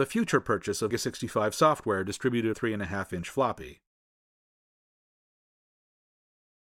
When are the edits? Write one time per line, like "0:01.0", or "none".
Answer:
0:00.9
0:02.5